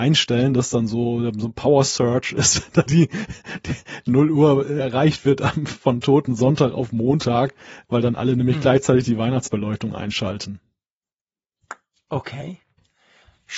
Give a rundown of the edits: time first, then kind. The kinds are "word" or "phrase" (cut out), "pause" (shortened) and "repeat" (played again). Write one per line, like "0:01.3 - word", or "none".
0:02.9 - word